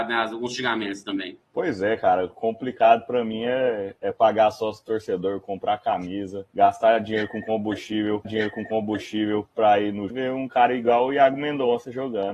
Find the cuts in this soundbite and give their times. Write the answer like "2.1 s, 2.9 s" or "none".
1.5 s, 4.0 s, 6.5 s, 8.2 s, 10.1 s